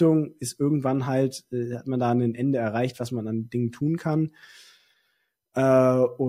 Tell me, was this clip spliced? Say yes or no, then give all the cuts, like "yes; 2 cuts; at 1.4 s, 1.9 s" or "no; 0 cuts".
no; 0 cuts